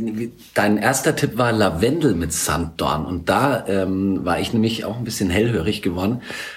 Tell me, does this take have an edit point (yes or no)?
no